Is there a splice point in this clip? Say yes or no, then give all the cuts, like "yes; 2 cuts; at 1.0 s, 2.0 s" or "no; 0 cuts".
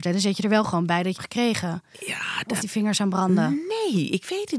yes; 2 cuts; at 1.1 s, 2.6 s